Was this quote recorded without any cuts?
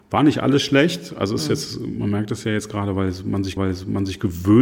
no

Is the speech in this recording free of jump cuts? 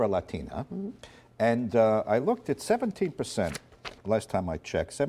yes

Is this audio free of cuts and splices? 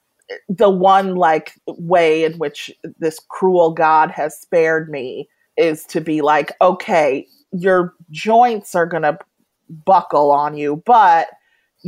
no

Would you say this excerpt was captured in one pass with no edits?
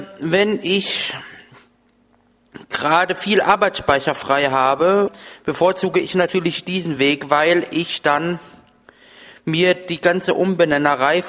yes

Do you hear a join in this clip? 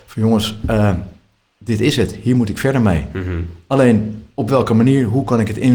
no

